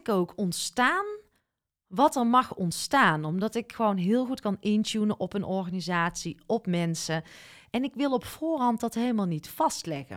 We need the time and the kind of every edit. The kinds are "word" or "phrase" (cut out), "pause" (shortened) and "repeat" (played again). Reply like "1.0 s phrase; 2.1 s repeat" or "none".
none